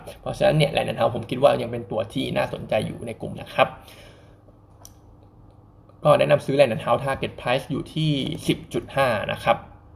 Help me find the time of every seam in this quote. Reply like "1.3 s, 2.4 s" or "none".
3.3 s